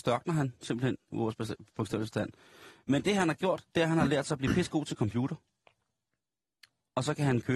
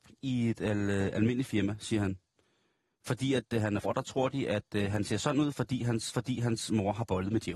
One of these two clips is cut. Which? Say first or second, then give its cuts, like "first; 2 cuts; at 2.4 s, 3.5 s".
second; 2 cuts; at 3.8 s, 6.1 s